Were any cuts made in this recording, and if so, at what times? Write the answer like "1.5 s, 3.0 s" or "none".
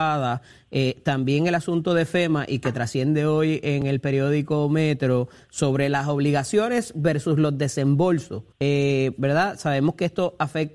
8.5 s